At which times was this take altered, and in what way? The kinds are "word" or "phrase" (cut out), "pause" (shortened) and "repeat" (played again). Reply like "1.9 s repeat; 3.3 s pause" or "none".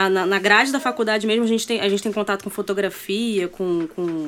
none